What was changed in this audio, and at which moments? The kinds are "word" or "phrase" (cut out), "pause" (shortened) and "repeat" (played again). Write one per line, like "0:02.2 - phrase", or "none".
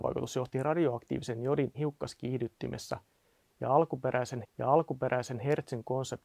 0:01.7 - word
0:04.4 - repeat